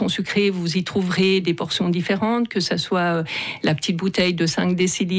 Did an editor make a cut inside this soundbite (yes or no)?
no